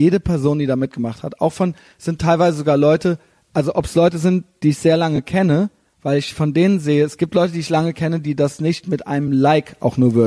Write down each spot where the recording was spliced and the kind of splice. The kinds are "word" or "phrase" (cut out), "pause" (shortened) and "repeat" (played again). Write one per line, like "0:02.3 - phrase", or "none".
none